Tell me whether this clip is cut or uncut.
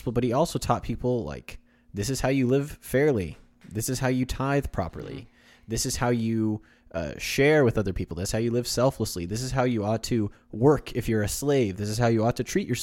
uncut